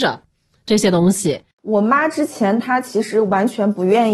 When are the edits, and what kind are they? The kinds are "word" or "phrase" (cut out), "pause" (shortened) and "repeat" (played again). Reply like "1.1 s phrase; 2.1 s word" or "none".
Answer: 1.5 s pause